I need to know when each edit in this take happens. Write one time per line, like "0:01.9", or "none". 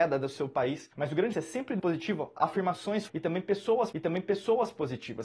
0:00.9
0:01.3
0:01.8
0:03.1
0:03.9